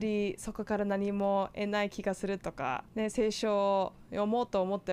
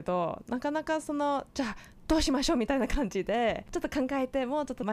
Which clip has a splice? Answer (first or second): first